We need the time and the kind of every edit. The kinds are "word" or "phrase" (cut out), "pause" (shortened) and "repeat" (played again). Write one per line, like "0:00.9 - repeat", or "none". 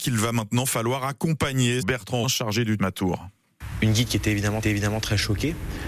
0:01.8 - word
0:02.2 - phrase
0:02.8 - word
0:04.6 - repeat